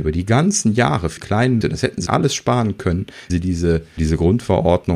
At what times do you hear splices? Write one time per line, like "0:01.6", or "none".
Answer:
0:01.2
0:01.6
0:02.1
0:03.3
0:04.0